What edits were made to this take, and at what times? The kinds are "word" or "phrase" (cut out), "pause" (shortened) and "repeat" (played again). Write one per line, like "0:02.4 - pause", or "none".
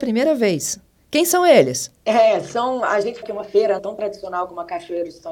0:03.2 - word
0:03.8 - word